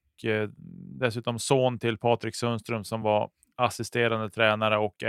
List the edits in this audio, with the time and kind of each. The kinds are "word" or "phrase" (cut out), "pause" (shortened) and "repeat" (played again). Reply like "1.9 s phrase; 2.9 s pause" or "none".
none